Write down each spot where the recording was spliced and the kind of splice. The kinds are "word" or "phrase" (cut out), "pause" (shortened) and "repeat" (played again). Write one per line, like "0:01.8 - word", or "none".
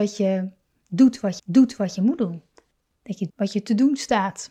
0:01.4 - repeat
0:02.7 - pause
0:03.3 - word